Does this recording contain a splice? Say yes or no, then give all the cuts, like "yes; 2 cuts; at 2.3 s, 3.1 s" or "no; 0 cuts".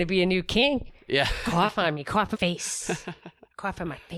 yes; 1 cut; at 2.3 s